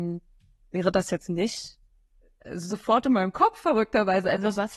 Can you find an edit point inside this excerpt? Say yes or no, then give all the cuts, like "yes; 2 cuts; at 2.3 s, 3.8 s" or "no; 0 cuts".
yes; 1 cut; at 2.2 s